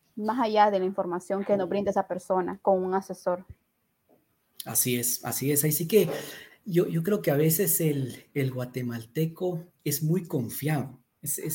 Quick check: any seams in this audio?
no; 0 cuts

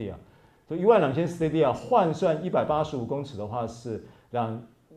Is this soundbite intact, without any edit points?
yes; 0 cuts

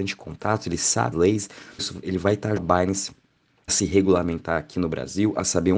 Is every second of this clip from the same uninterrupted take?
no; 4 cuts; at 1.1 s, 1.8 s, 2.6 s, 3.7 s

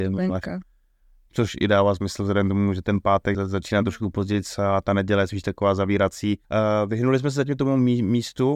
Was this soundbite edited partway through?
yes; 2 cuts; at 3.3 s, 6.4 s

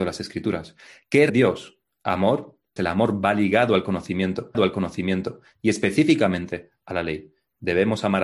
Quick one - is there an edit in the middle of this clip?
yes; 3 cuts; at 1.3 s, 2.8 s, 4.5 s

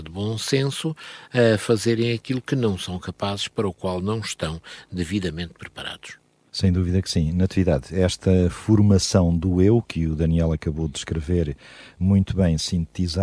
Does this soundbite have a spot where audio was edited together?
no; 0 cuts

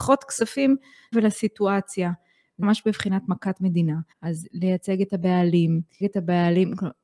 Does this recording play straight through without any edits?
no; 4 cuts; at 1.1 s, 2.6 s, 4.1 s, 6.0 s

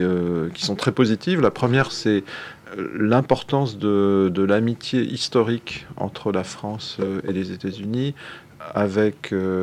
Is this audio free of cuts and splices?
yes; 0 cuts

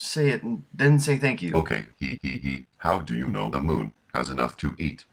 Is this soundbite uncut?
no; 3 cuts; at 2.2 s, 2.7 s, 3.5 s

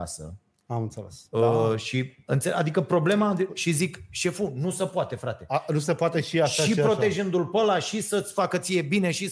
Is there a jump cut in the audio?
no; 0 cuts

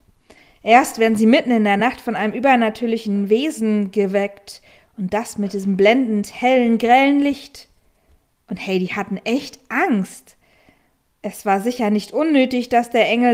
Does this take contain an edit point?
no; 0 cuts

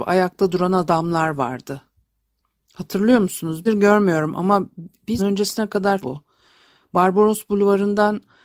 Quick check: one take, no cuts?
no; 3 cuts; at 3.7 s, 5.2 s, 6.0 s

